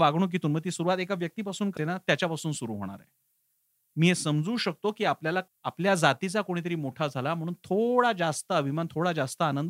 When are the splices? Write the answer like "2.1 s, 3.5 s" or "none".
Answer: 1.8 s, 5.5 s

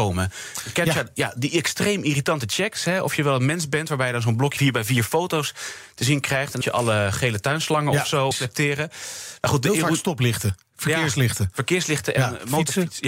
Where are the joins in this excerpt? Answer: 4.6 s, 6.6 s, 8.3 s

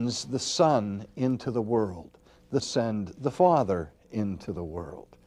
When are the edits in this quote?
2.6 s

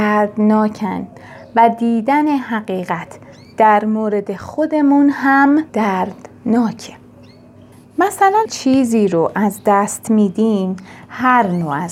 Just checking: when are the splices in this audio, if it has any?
5.7 s, 8.5 s

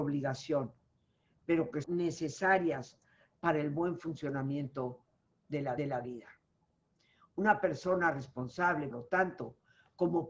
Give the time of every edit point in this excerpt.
1.8 s, 5.8 s, 8.9 s

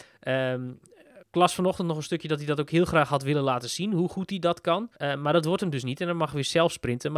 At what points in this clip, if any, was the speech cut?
1.2 s, 5.0 s

